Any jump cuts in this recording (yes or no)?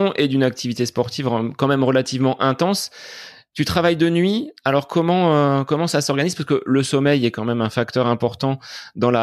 no